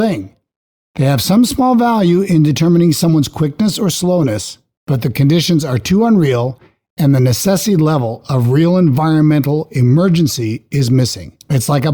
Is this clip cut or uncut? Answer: uncut